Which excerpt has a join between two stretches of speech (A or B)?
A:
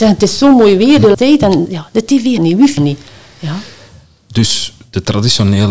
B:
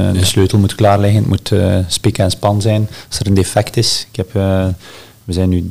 A